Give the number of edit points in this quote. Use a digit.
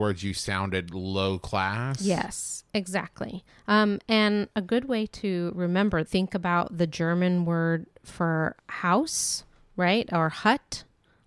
2